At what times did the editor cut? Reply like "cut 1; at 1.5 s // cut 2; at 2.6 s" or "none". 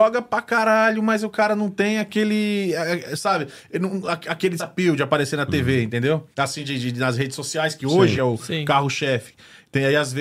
cut 1; at 4.6 s // cut 2; at 6.3 s // cut 3; at 8.2 s